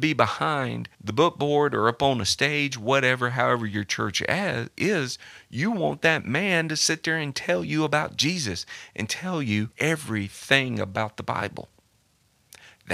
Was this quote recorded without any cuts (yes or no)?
no